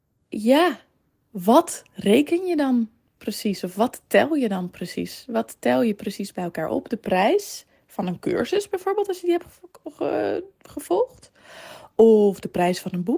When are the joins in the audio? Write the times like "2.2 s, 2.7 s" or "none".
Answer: none